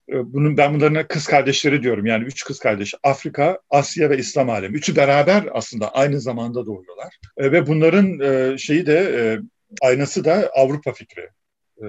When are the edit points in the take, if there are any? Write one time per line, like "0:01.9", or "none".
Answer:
0:05.9
0:07.3
0:09.8